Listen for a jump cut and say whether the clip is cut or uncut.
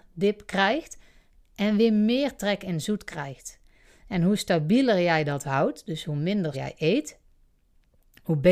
cut